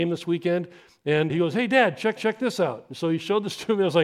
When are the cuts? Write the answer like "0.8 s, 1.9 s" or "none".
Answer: 1.3 s, 2.2 s